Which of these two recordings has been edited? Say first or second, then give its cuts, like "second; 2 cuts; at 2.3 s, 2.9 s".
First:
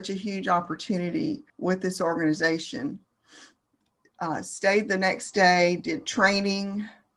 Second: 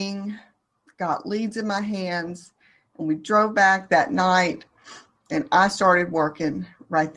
first; 1 cut; at 1.5 s